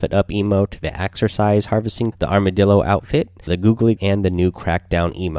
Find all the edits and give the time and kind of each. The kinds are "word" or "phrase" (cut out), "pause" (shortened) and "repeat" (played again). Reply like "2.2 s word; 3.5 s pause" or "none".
2.1 s word; 3.5 s word; 4.0 s word